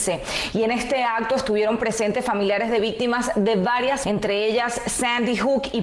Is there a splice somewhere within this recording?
yes; 1 cut; at 4.0 s

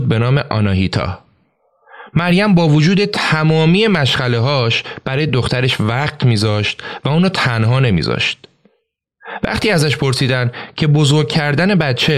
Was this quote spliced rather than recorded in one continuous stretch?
no; 0 cuts

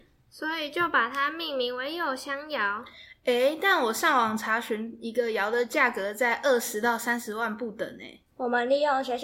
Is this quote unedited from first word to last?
no; 1 cut; at 8.3 s

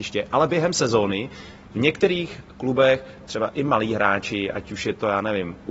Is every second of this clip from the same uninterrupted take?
yes; 0 cuts

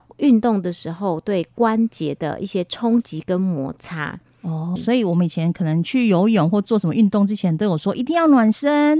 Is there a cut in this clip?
yes; 1 cut; at 4.8 s

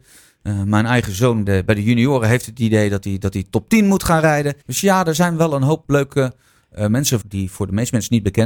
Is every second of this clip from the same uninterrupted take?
no; 4 cuts; at 1.5 s, 4.6 s, 5.8 s, 7.2 s

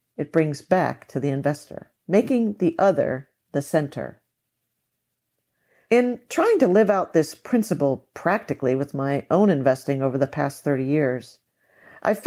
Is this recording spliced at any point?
yes; 1 cut; at 2.0 s

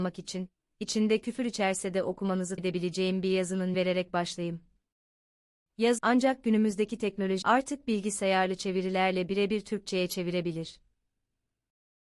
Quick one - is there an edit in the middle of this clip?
yes; 4 cuts; at 2.6 s, 3.7 s, 6.0 s, 7.4 s

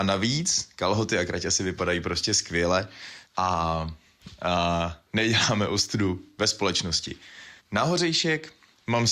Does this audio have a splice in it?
yes; 2 cuts; at 3.3 s, 7.6 s

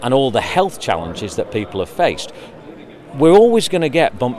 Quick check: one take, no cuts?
yes; 0 cuts

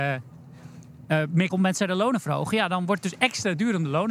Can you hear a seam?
yes; 1 cut; at 1.5 s

